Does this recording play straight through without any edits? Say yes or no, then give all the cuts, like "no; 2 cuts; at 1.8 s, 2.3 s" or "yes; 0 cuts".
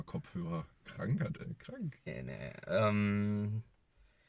no; 1 cut; at 1.3 s